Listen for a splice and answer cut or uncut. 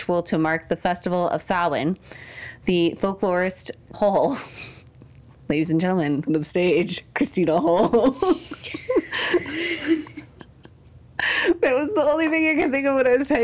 cut